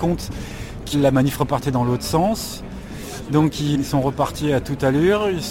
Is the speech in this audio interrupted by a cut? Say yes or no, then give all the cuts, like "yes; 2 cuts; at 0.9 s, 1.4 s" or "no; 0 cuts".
yes; 1 cut; at 3.7 s